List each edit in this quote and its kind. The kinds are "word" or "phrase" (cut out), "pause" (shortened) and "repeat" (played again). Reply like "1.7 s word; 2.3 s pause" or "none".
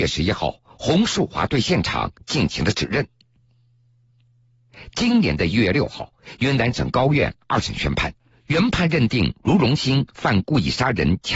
8.3 s pause